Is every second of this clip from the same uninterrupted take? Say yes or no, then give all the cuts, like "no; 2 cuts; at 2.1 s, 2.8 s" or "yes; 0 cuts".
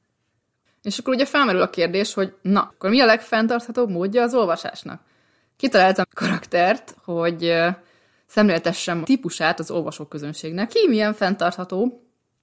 no; 4 cuts; at 2.7 s, 6.0 s, 9.0 s, 10.7 s